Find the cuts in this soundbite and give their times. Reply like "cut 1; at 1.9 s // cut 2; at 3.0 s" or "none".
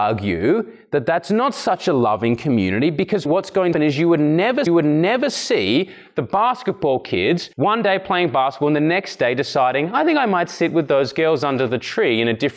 cut 1; at 3.3 s // cut 2; at 3.7 s // cut 3; at 4.7 s // cut 4; at 7.5 s